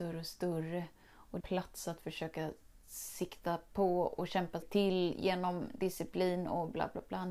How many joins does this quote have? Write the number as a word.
two